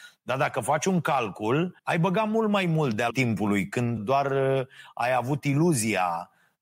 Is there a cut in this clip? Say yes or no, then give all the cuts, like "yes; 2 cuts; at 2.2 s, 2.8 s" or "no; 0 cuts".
yes; 3 cuts; at 1.8 s, 3.1 s, 4.0 s